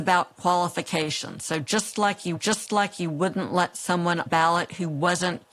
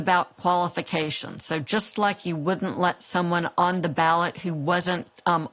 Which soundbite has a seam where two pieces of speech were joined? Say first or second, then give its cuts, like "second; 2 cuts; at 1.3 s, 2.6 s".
first; 2 cuts; at 2.4 s, 4.3 s